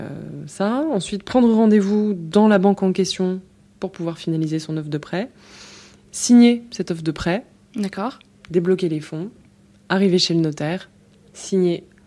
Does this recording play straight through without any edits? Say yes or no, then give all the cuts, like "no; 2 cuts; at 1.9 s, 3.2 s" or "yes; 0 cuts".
yes; 0 cuts